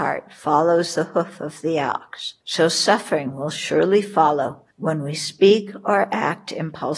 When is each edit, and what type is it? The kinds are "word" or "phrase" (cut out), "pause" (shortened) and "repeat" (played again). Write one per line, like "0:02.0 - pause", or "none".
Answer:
0:02.4 - pause
0:04.7 - pause

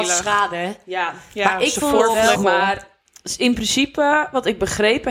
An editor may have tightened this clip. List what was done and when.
0:02.3 - word

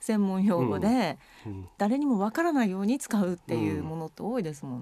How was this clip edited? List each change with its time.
none

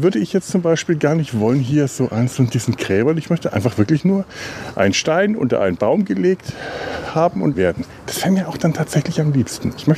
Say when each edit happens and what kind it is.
0:07.5 - phrase

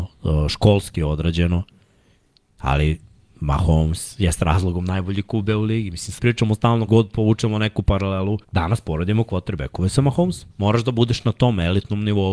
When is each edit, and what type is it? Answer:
0:06.2 - phrase
0:06.9 - word
0:08.4 - pause
0:10.5 - pause

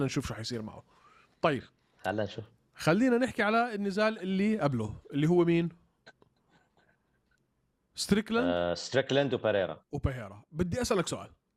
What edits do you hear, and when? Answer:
none

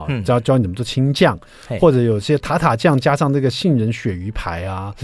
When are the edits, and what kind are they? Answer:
none

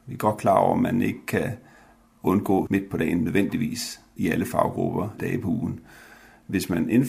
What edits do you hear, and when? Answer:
0:02.7 - word
0:04.2 - word
0:05.2 - word

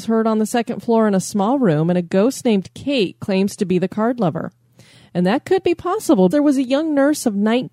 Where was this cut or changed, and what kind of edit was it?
0:06.3 - word

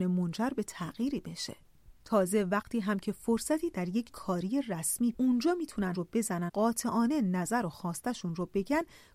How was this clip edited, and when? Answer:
0:02.0 - pause
0:04.1 - word
0:05.1 - phrase
0:05.9 - word
0:06.5 - word

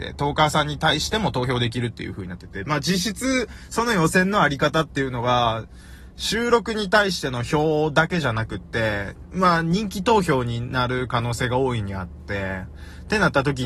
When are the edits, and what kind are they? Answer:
none

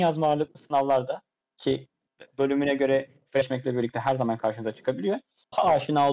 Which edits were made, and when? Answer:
none

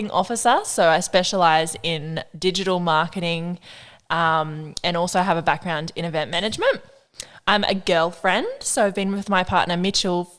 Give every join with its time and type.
none

